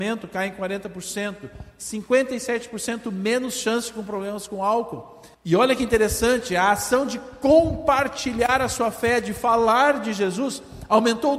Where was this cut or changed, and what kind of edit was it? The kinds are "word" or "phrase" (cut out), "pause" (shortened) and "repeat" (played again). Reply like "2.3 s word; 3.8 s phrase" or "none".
5.3 s pause